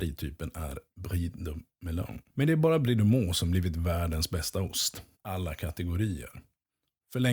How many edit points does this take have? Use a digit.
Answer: 2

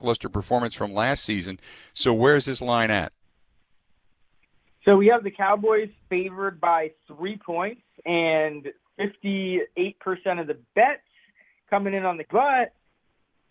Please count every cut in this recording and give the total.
1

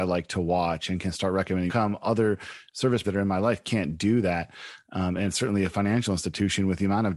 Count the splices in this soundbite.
2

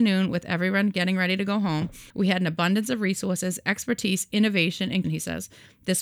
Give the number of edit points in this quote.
2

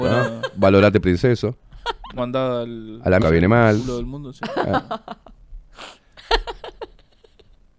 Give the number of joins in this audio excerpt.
2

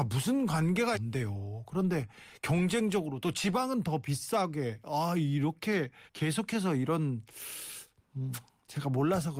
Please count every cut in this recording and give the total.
2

